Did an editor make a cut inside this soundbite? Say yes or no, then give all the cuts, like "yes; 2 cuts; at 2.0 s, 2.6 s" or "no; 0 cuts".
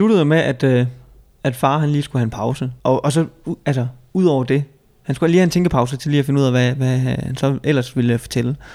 yes; 1 cut; at 2.8 s